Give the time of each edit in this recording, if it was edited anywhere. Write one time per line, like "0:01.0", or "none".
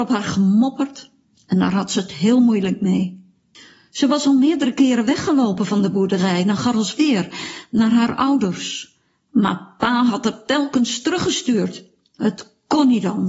none